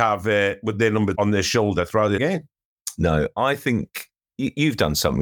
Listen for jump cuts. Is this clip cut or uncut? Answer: cut